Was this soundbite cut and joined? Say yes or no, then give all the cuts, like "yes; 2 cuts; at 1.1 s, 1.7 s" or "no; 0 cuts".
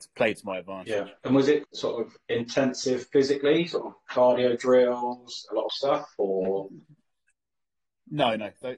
yes; 3 cuts; at 1.2 s, 1.6 s, 5.7 s